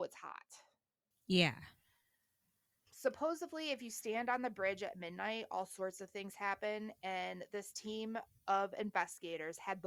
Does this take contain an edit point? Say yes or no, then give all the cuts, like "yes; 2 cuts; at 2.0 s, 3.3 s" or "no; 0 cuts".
no; 0 cuts